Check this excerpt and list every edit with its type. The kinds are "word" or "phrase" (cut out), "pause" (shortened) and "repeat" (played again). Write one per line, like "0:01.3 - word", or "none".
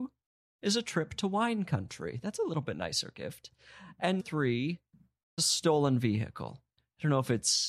0:04.2 - word
0:05.4 - word